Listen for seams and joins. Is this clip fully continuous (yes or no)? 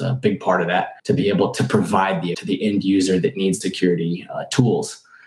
no